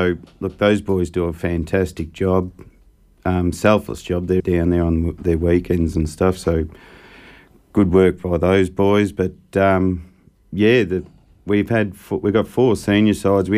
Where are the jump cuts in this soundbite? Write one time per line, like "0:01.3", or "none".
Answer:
0:04.4